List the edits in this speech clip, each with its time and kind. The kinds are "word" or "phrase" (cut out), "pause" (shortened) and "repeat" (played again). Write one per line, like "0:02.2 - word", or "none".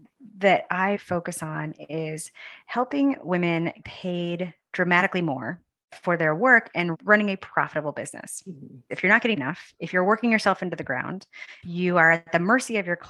0:00.9 - word
0:03.8 - word
0:09.4 - word
0:11.6 - word